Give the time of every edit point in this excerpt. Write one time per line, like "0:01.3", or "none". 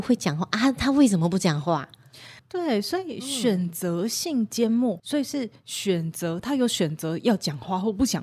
0:02.4
0:05.0